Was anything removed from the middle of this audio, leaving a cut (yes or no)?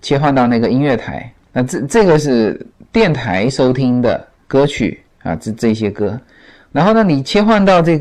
no